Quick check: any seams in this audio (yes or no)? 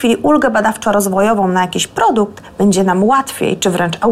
no